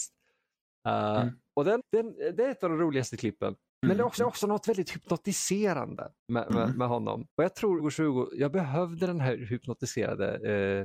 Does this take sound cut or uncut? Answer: cut